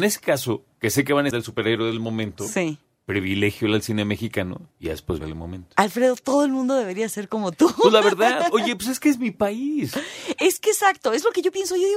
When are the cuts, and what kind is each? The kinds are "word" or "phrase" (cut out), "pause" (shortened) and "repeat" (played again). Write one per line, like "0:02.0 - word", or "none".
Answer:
0:01.3 - phrase
0:04.7 - pause
0:05.2 - phrase